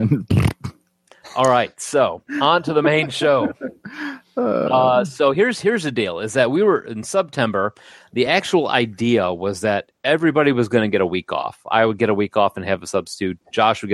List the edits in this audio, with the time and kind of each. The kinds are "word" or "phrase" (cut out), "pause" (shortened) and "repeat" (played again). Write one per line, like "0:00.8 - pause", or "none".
none